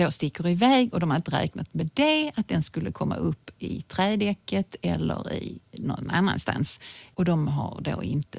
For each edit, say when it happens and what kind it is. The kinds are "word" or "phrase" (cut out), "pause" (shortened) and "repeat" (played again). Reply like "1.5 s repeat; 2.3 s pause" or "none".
none